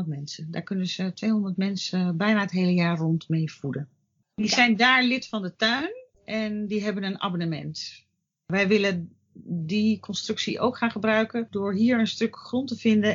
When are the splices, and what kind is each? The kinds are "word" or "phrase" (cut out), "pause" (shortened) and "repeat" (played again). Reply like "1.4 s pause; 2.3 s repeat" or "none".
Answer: none